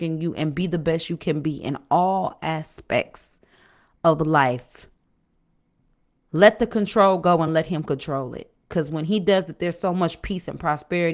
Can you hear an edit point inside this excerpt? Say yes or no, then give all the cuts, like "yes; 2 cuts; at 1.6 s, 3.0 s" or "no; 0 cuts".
no; 0 cuts